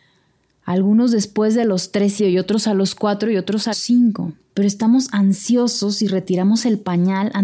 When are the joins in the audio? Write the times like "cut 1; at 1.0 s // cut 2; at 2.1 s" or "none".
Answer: cut 1; at 2.2 s // cut 2; at 3.7 s // cut 3; at 4.4 s